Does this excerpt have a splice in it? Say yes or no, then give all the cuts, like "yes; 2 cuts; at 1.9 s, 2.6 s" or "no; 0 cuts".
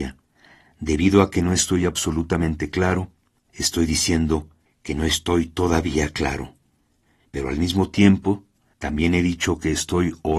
no; 0 cuts